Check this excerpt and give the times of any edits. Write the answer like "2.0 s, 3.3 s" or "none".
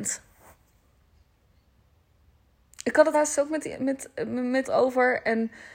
3.1 s, 3.7 s, 4.6 s